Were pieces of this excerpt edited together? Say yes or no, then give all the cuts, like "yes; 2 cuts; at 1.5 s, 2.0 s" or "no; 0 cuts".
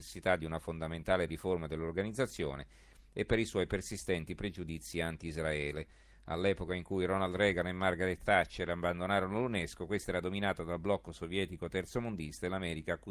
no; 0 cuts